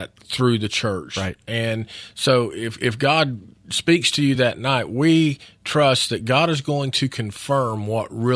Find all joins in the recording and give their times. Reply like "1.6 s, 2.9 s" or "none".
none